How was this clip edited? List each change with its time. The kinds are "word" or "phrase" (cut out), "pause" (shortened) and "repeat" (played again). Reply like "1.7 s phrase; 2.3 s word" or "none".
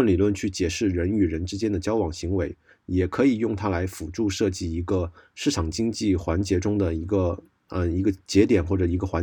none